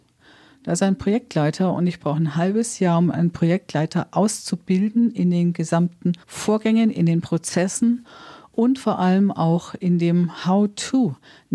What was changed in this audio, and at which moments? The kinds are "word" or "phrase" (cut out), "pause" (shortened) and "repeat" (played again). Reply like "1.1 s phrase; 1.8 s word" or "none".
6.2 s pause